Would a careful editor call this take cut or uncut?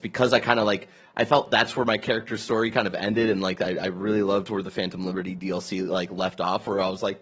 uncut